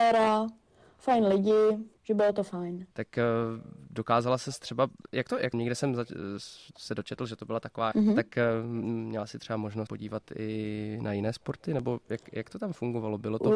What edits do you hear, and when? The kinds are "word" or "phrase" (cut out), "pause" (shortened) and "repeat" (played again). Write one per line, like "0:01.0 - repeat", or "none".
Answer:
0:02.0 - pause
0:02.9 - pause
0:05.5 - phrase
0:07.9 - phrase
0:09.9 - word